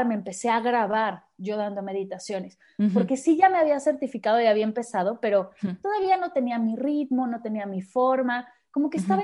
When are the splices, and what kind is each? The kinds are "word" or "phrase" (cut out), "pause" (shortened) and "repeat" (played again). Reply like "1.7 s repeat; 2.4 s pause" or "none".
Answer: none